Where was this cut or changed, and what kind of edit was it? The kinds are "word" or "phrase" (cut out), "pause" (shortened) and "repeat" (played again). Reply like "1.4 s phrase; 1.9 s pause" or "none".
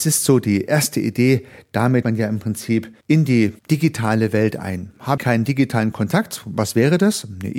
2.0 s word; 3.0 s pause; 3.6 s pause; 5.2 s word